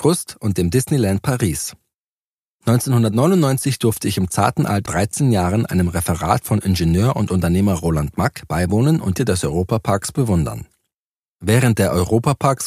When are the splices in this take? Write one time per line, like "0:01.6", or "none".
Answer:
0:04.9
0:09.2